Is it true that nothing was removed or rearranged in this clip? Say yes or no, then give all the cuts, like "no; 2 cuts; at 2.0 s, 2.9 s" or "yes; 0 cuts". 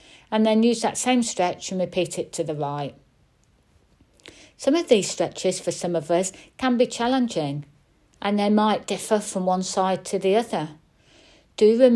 yes; 0 cuts